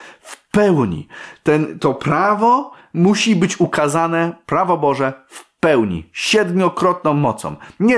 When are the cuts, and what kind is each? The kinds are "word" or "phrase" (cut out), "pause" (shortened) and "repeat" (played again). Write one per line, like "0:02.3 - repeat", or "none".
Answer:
none